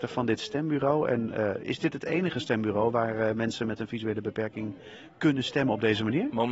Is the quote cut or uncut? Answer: uncut